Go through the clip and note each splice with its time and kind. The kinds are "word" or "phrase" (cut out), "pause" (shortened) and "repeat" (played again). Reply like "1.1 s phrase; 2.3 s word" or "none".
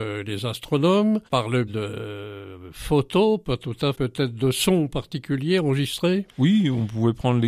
1.3 s pause; 1.7 s word; 3.9 s phrase; 6.3 s pause